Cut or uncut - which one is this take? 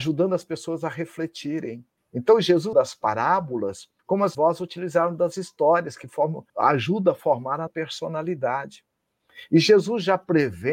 cut